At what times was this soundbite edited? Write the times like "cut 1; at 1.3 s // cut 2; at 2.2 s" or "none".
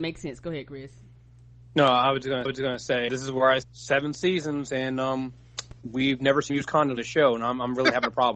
cut 1; at 2.4 s // cut 2; at 3.1 s // cut 3; at 3.6 s // cut 4; at 5.8 s // cut 5; at 6.5 s // cut 6; at 7.0 s